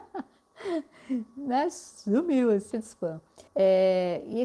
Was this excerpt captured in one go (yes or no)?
no